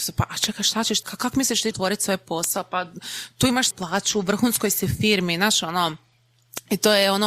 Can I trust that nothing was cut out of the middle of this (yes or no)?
no